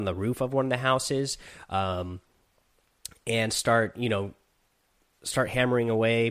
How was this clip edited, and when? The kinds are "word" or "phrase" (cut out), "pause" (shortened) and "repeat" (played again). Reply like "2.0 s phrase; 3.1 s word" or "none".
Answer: none